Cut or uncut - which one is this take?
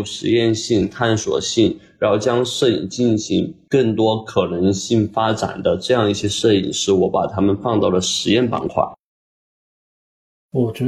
uncut